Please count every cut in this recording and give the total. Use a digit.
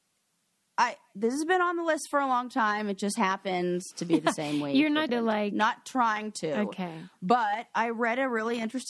1